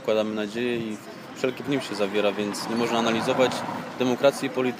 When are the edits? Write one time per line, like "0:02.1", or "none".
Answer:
0:01.6